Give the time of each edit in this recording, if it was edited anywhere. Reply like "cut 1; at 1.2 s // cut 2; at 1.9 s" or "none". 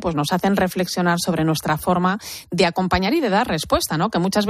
none